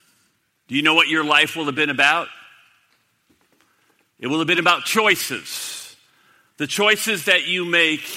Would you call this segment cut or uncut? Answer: uncut